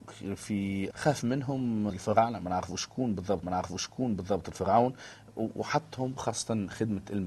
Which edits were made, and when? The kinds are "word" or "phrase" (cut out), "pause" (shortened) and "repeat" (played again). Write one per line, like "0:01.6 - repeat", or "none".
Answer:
0:00.9 - phrase
0:01.9 - word
0:03.4 - repeat
0:06.2 - phrase